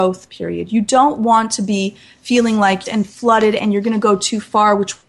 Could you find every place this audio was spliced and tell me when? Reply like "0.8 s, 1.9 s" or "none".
2.8 s